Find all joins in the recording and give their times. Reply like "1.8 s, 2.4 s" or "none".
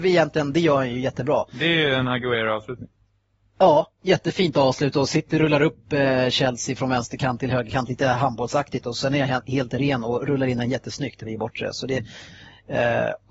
none